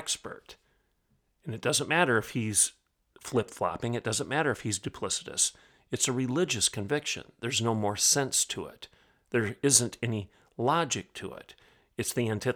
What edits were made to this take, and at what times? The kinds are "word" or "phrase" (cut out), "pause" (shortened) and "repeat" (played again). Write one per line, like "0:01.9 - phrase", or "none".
none